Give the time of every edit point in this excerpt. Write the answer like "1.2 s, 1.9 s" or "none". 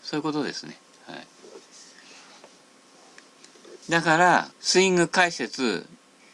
3.8 s, 4.5 s